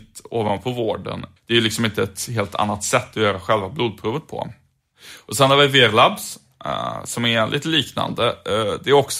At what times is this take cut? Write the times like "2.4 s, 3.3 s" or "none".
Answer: 1.4 s